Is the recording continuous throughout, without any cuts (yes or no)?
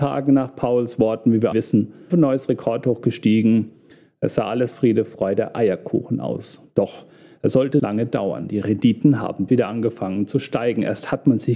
no